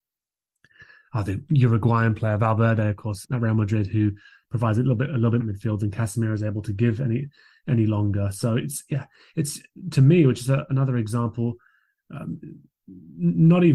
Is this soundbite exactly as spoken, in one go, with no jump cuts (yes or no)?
no